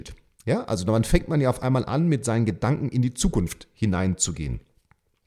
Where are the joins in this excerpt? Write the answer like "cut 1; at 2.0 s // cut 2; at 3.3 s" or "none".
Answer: none